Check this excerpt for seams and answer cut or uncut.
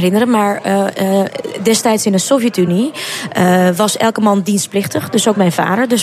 uncut